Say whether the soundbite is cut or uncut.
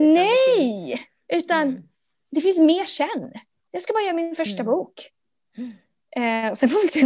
uncut